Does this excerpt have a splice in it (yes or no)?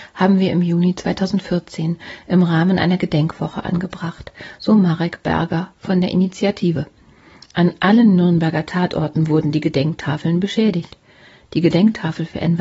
no